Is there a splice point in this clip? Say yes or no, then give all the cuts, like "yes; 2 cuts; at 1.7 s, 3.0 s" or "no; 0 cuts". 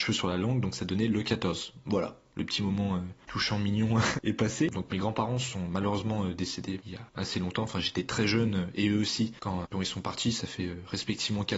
yes; 1 cut; at 9.6 s